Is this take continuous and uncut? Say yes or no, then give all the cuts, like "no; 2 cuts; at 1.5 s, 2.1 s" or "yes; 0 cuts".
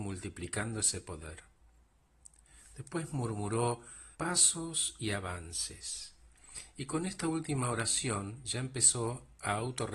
no; 1 cut; at 4.1 s